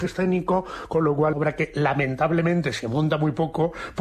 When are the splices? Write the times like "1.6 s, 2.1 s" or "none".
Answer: 1.3 s